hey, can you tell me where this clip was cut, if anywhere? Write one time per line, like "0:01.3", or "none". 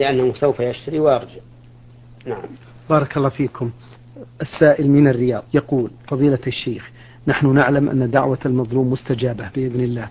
0:05.5